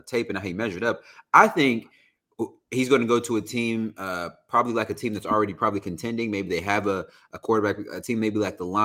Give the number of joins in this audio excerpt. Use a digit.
0